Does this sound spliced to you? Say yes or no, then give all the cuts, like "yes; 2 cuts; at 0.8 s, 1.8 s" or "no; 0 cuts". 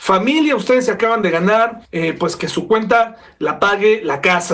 yes; 1 cut; at 1.8 s